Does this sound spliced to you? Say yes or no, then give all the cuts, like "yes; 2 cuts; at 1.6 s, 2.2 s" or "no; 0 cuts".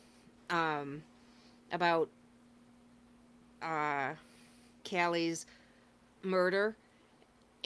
yes; 1 cut; at 4.8 s